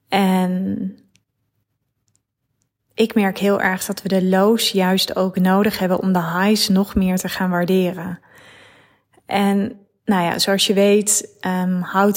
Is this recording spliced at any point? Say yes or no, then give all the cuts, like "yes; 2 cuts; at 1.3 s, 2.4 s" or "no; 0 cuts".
no; 0 cuts